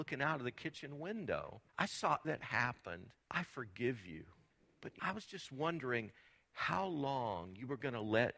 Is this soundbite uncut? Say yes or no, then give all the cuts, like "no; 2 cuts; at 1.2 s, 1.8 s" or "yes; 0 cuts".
no; 5 cuts; at 1.7 s, 2.2 s, 3.2 s, 4.5 s, 5.0 s